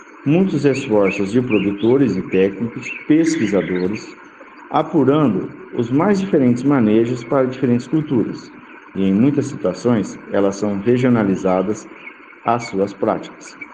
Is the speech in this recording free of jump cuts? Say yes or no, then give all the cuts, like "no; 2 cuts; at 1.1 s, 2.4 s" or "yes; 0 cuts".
yes; 0 cuts